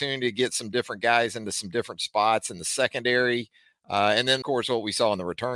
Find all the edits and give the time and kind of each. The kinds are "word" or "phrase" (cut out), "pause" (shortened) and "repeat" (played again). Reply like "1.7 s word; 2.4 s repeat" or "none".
4.4 s word